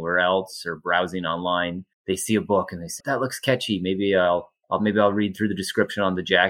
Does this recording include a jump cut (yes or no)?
yes